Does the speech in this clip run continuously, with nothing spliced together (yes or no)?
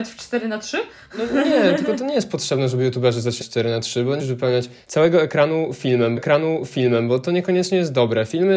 no